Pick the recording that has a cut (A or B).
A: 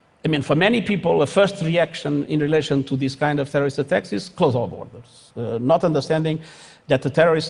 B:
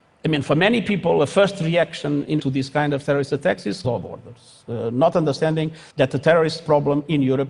B